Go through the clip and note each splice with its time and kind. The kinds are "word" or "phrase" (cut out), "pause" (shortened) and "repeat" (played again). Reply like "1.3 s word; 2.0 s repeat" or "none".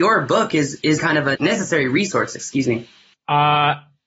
1.0 s word; 1.3 s word; 3.1 s pause